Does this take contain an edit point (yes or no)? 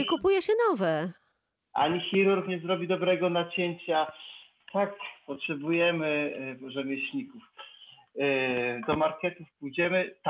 yes